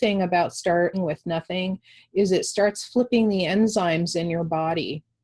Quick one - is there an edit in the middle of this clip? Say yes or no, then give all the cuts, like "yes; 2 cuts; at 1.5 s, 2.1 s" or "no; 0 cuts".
yes; 1 cut; at 0.9 s